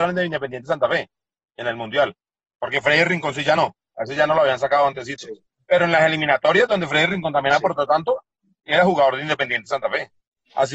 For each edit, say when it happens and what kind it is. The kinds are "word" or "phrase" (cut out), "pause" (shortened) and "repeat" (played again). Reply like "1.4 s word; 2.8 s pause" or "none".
none